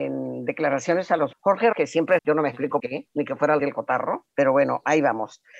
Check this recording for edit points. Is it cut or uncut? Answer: cut